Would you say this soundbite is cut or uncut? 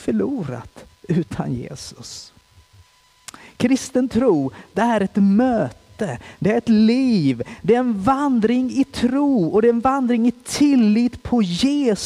uncut